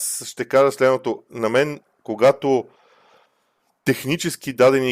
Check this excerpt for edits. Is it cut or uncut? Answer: uncut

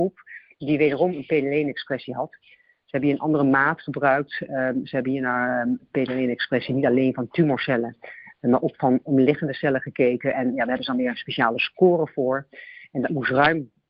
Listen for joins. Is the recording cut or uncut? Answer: uncut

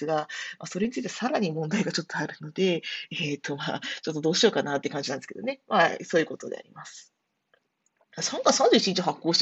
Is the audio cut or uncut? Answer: uncut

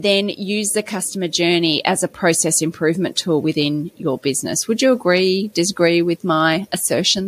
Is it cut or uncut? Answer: uncut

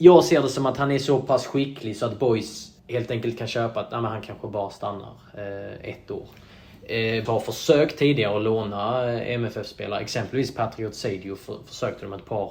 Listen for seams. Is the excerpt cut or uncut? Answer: cut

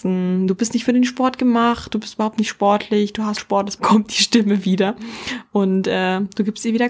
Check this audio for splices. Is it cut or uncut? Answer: cut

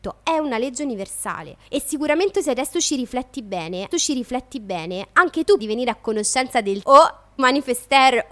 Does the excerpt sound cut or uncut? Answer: cut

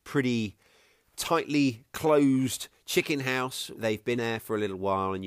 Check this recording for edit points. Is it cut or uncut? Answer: cut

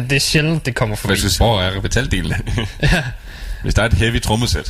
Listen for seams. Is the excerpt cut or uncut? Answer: cut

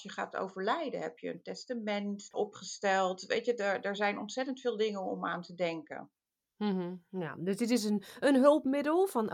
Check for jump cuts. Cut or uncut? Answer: uncut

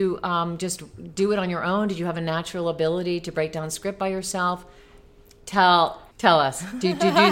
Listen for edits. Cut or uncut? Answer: cut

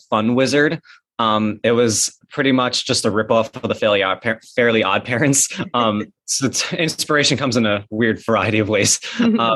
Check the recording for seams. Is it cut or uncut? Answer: uncut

